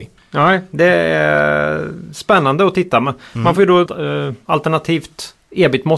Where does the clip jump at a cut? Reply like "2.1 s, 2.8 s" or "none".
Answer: 3.9 s